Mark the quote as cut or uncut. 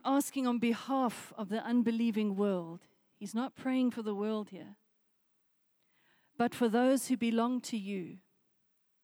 uncut